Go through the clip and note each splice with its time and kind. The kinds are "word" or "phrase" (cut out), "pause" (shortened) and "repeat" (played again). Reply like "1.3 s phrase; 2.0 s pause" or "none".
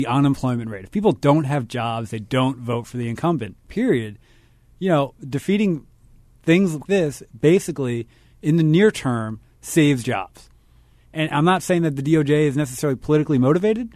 6.9 s phrase